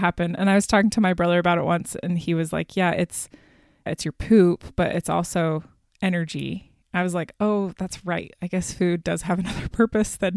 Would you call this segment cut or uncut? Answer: uncut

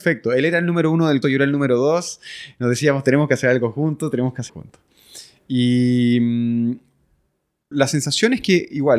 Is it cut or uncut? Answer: cut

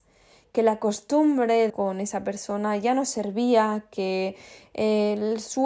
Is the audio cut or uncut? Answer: cut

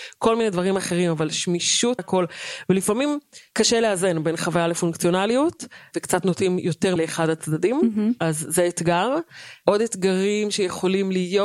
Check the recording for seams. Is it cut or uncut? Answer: cut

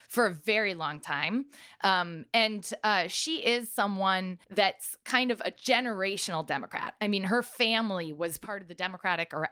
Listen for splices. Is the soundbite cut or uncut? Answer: cut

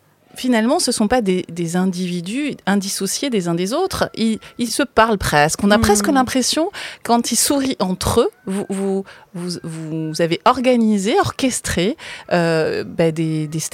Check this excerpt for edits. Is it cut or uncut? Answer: uncut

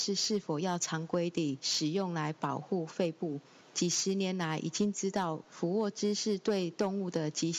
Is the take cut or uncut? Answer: uncut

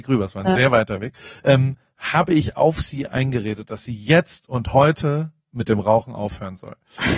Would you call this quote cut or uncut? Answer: uncut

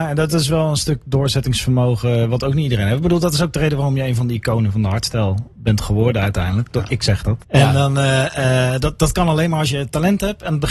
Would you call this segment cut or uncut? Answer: cut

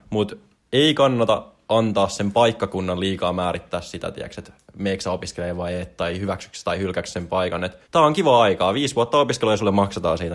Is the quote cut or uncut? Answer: cut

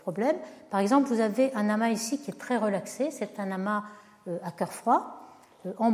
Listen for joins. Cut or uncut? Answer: uncut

